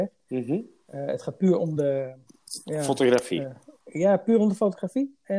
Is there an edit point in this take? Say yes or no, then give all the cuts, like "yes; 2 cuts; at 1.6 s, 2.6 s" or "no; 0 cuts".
no; 0 cuts